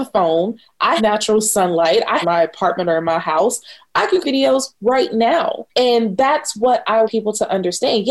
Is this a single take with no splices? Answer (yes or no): no